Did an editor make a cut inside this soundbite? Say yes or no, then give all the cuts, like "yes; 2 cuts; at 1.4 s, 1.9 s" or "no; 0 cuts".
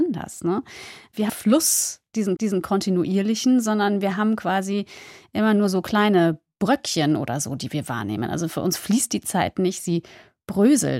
yes; 2 cuts; at 1.3 s, 2.4 s